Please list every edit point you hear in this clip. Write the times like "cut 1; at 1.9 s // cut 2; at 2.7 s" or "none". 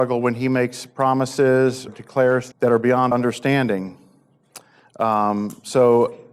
cut 1; at 1.9 s // cut 2; at 2.5 s // cut 3; at 3.1 s